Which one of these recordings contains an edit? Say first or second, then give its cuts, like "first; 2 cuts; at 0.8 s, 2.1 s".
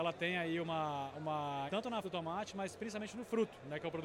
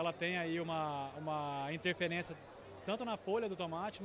first; 2 cuts; at 1.7 s, 2.0 s